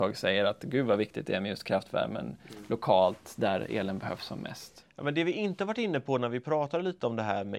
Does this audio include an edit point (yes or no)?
no